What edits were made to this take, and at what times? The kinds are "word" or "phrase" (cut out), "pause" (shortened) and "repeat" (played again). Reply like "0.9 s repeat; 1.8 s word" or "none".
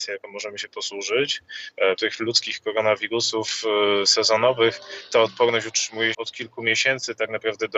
2.0 s word; 6.1 s word